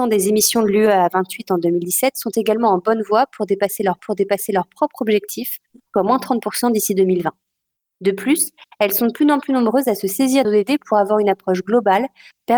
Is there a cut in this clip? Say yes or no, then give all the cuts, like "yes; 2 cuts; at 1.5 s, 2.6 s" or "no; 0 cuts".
yes; 2 cuts; at 4.0 s, 10.4 s